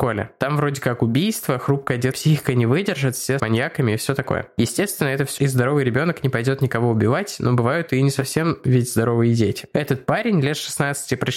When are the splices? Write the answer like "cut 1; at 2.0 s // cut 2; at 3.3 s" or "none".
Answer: cut 1; at 2.1 s // cut 2; at 3.4 s // cut 3; at 5.4 s